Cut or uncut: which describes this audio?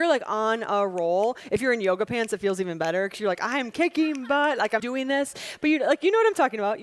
cut